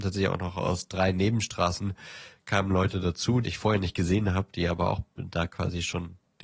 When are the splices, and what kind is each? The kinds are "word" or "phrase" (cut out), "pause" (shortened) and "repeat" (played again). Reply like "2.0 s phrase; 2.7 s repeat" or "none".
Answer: 3.4 s word